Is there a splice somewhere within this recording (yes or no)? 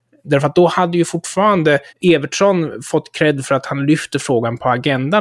yes